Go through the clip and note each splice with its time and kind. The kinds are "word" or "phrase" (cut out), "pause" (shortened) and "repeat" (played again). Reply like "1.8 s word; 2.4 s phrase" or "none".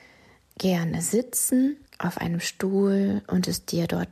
1.9 s pause